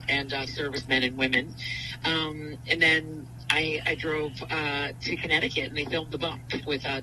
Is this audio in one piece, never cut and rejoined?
yes; 0 cuts

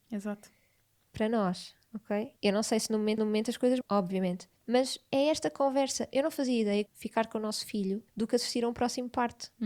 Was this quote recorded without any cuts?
no; 6 cuts; at 2.4 s, 3.2 s, 3.8 s, 4.6 s, 6.9 s, 8.1 s

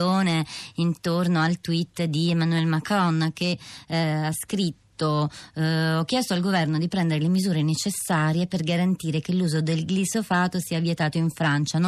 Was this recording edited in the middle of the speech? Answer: no; 0 cuts

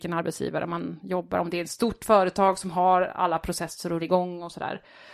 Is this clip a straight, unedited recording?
no; 1 cut; at 4.0 s

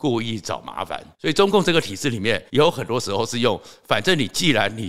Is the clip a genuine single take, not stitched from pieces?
no; 2 cuts; at 1.1 s, 2.5 s

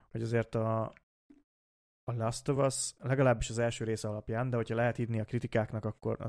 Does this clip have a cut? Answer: no; 0 cuts

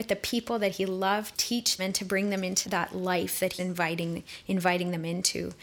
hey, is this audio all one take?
no; 4 cuts; at 1.3 s, 1.8 s, 2.6 s, 3.6 s

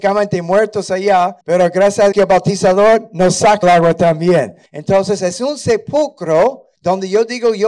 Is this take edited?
yes; 5 cuts; at 1.4 s, 2.1 s, 3.6 s, 4.7 s, 6.7 s

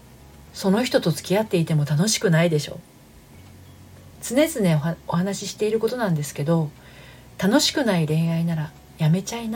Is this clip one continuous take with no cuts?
no; 1 cut; at 4.1 s

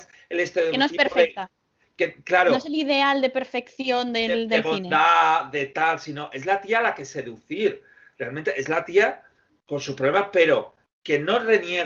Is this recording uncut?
yes; 0 cuts

